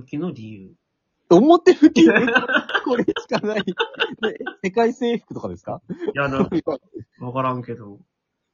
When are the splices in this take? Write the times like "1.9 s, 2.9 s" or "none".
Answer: none